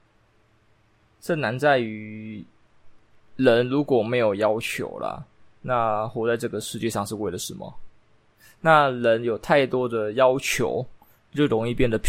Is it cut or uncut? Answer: uncut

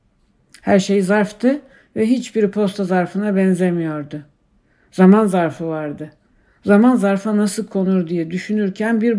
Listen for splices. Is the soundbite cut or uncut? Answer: uncut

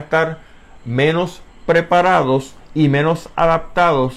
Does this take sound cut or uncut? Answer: uncut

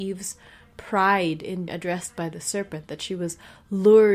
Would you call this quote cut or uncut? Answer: cut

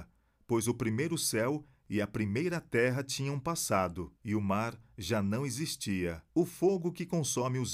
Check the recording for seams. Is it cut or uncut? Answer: cut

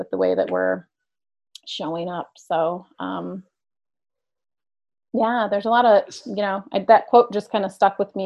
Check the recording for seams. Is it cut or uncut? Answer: uncut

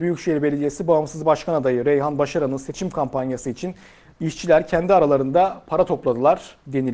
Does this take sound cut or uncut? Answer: uncut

